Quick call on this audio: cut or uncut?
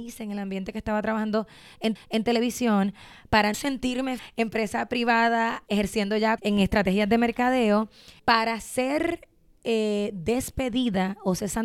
cut